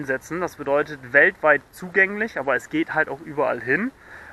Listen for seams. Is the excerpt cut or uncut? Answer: uncut